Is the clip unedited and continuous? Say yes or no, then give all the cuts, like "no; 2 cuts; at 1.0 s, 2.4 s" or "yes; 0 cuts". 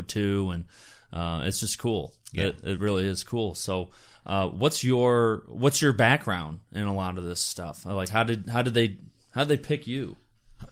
yes; 0 cuts